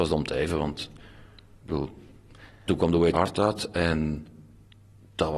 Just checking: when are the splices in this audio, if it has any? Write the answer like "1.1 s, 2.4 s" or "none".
2.7 s, 3.1 s